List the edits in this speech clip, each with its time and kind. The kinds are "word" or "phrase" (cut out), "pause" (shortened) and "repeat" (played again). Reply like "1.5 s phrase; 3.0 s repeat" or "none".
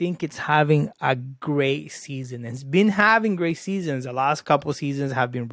none

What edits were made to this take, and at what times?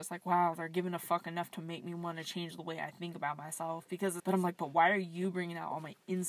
4.2 s word

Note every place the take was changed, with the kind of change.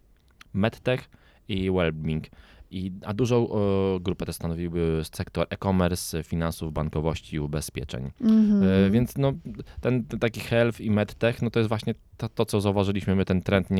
none

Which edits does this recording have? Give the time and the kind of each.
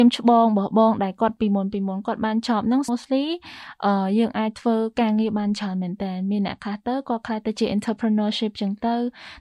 2.9 s word

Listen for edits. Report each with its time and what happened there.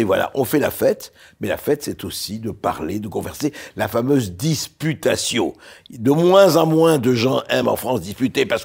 none

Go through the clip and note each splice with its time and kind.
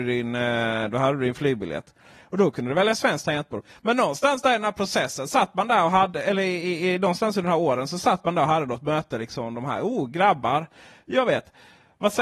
none

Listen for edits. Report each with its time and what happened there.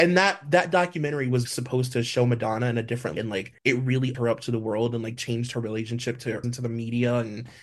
1.5 s word; 3.2 s word; 3.6 s pause; 4.1 s word; 6.4 s phrase

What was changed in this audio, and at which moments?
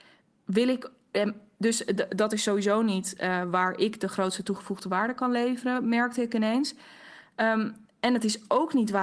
none

